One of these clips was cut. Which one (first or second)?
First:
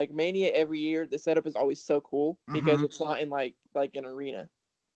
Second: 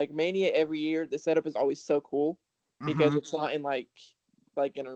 first